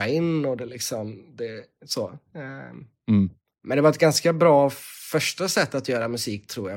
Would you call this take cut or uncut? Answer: uncut